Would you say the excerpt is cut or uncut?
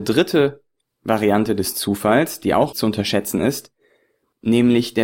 cut